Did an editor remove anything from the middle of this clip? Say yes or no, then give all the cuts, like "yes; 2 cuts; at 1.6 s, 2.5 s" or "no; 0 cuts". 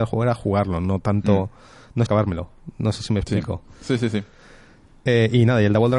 yes; 1 cut; at 2.1 s